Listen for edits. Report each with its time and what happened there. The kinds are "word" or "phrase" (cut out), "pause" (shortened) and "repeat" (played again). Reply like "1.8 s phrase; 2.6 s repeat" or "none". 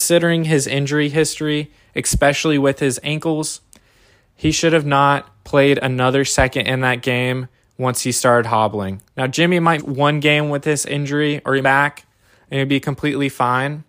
9.1 s pause; 9.8 s word; 11.6 s phrase